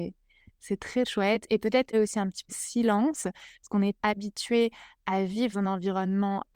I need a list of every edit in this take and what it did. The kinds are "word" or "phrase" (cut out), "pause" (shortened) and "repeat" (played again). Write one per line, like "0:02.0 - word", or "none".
0:01.0 - word
0:01.9 - word
0:02.5 - word
0:04.0 - word
0:05.5 - word